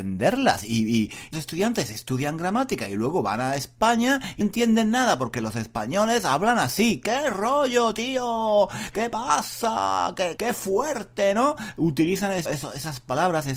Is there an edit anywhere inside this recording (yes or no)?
yes